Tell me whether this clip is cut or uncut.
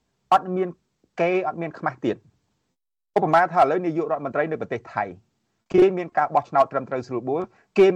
uncut